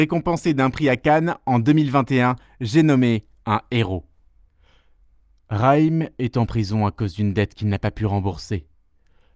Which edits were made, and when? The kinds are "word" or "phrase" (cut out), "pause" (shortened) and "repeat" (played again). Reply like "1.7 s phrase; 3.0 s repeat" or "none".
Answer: none

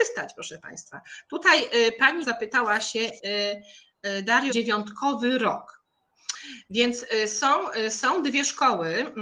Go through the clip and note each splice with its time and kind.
2.2 s word; 4.5 s phrase

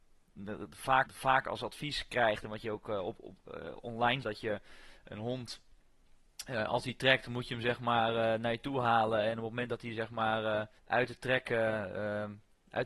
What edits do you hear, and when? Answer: 1.1 s repeat; 4.2 s phrase; 10.8 s pause

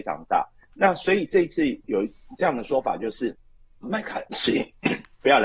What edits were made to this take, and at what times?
3.8 s word

